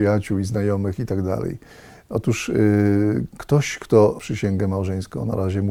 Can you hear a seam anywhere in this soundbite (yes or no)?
yes